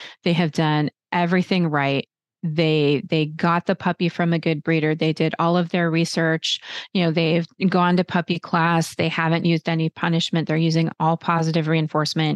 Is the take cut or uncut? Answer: uncut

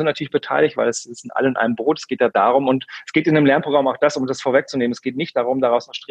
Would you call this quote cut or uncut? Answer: uncut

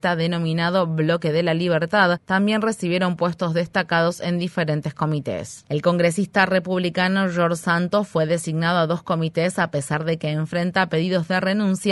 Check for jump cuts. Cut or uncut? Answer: uncut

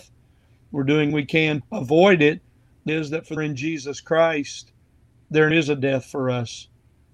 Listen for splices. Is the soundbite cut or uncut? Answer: cut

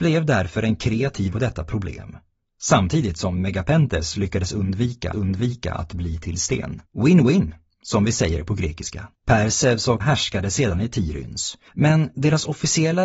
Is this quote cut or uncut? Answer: cut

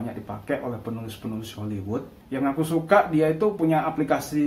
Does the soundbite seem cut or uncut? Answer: uncut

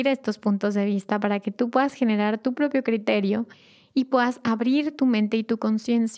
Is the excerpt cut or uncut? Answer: uncut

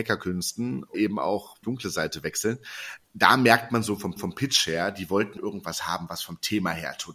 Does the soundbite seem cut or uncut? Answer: cut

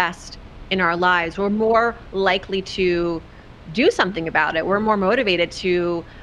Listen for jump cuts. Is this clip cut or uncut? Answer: uncut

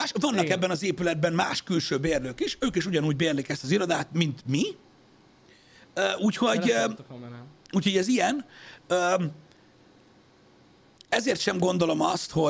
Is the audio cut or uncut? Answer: uncut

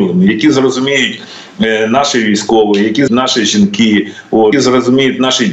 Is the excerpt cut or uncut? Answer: cut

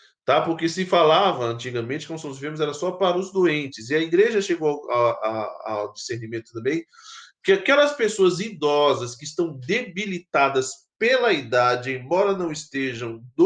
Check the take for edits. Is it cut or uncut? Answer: uncut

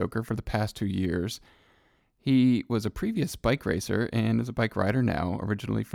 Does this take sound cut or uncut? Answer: uncut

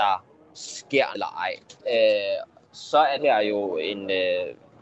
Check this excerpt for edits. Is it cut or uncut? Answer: cut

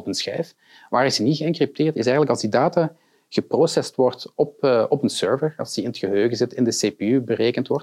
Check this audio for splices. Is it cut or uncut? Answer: uncut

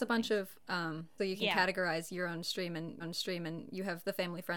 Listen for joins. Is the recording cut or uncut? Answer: cut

